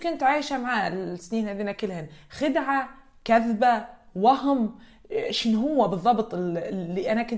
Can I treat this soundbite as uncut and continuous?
yes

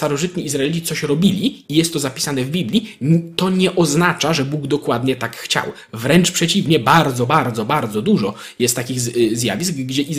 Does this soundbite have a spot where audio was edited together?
no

